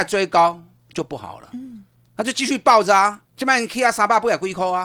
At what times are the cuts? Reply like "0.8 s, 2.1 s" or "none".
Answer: 3.2 s